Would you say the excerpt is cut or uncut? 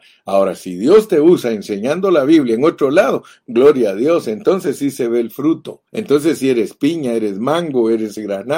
cut